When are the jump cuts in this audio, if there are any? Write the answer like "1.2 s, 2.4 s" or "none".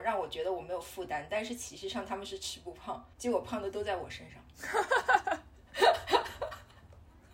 3.1 s